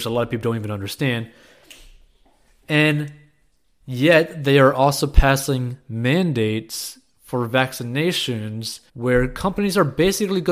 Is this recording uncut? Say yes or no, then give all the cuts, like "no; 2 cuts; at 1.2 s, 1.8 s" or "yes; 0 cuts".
no; 1 cut; at 8.9 s